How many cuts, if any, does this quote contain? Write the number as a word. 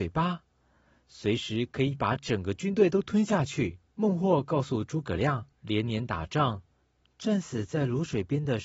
two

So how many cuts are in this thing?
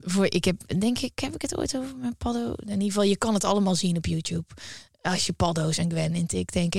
zero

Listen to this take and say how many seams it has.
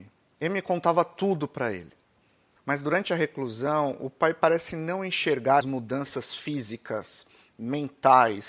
one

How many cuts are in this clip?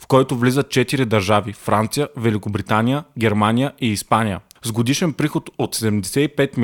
zero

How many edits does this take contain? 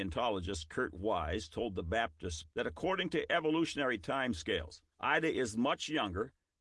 two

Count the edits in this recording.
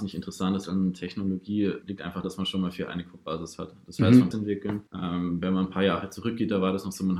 five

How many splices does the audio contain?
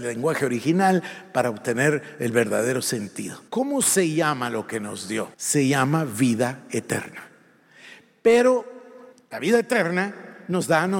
three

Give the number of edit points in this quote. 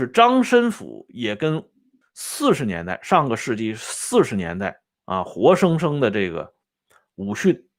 two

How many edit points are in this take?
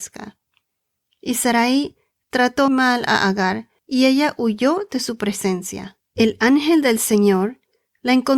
three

